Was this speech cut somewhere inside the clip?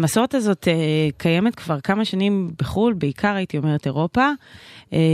no; 0 cuts

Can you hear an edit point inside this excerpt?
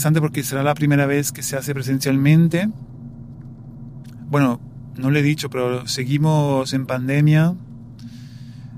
no; 0 cuts

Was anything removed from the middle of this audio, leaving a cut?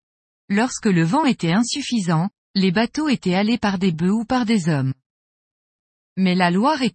no; 0 cuts

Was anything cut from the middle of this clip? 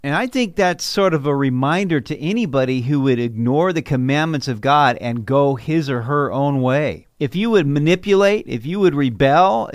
yes; 1 cut; at 7.1 s

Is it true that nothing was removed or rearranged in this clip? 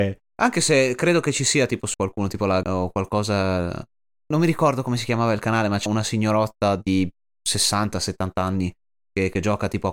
no; 3 cuts; at 1.9 s, 2.6 s, 5.9 s

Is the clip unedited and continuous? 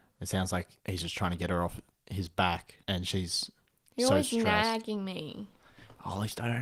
yes; 0 cuts

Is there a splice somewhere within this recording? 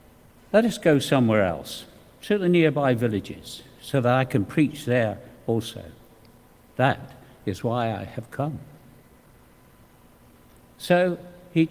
no; 0 cuts

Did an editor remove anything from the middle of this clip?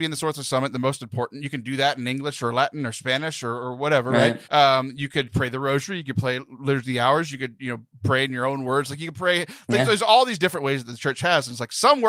yes; 1 cut; at 4.4 s

